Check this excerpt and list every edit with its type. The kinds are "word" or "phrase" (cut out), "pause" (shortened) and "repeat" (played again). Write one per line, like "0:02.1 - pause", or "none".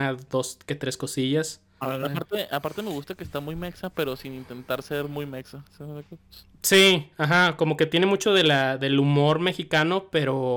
none